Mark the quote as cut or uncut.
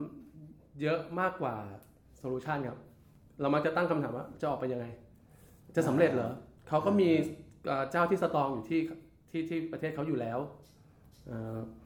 uncut